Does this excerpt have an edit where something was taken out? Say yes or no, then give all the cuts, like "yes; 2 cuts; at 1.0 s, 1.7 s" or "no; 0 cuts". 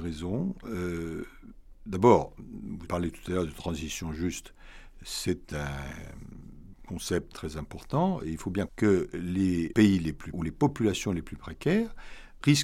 yes; 4 cuts; at 2.9 s, 8.7 s, 9.7 s, 10.3 s